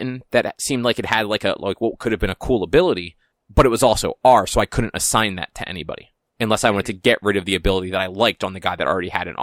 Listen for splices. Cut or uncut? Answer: uncut